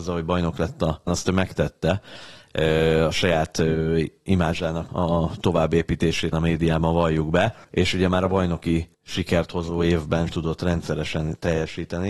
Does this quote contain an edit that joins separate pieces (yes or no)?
yes